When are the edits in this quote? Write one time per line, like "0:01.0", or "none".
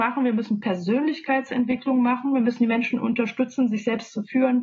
none